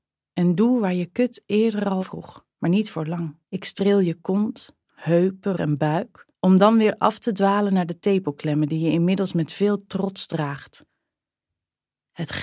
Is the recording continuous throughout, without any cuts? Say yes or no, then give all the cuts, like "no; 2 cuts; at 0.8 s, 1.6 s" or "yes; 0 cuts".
no; 6 cuts; at 2.0 s, 2.5 s, 3.4 s, 4.8 s, 5.6 s, 6.3 s